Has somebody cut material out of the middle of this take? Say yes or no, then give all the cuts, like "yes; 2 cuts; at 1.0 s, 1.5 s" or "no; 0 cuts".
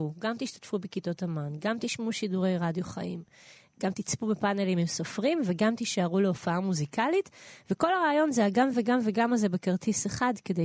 no; 0 cuts